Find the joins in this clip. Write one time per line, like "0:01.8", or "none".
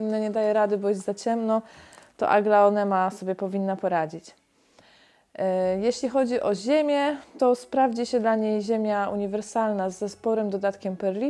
none